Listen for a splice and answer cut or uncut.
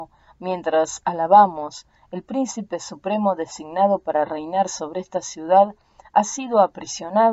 uncut